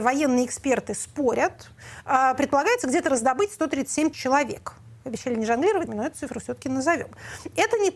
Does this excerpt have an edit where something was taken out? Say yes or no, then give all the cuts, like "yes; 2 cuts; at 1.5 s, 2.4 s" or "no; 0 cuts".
yes; 2 cuts; at 4.1 s, 5.9 s